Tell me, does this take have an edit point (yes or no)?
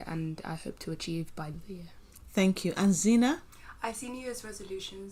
yes